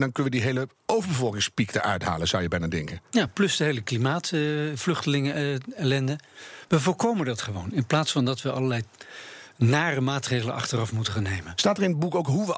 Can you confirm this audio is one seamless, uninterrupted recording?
yes; 0 cuts

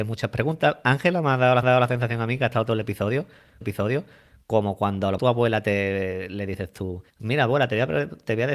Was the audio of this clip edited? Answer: yes; 4 cuts; at 1.6 s, 3.6 s, 5.2 s, 7.1 s

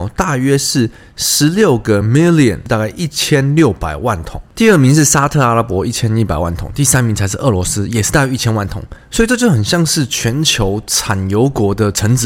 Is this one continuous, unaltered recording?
yes; 0 cuts

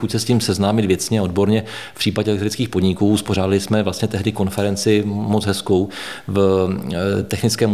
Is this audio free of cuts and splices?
yes; 0 cuts

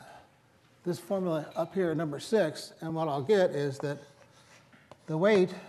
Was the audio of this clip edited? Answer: no; 0 cuts

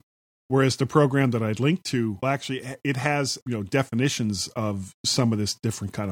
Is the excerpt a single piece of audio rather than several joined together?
no; 2 cuts; at 2.2 s, 3.4 s

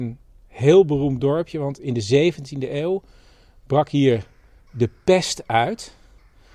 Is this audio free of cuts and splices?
yes; 0 cuts

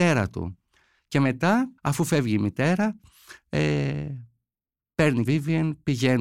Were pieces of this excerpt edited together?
yes; 2 cuts; at 1.8 s, 5.2 s

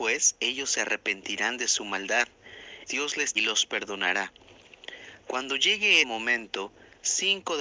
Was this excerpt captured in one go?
no; 3 cuts; at 2.9 s, 3.4 s, 6.0 s

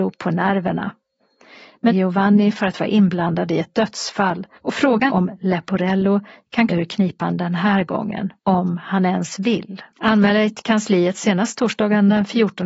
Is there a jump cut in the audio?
yes; 6 cuts; at 1.9 s, 4.6 s, 5.1 s, 6.7 s, 8.4 s, 9.9 s

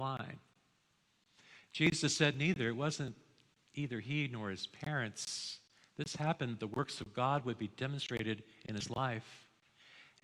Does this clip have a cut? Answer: no; 0 cuts

